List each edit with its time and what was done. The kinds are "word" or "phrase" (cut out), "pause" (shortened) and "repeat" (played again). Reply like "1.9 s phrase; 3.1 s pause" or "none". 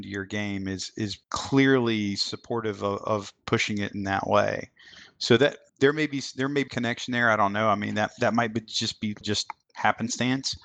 1.2 s pause; 6.7 s word; 9.2 s word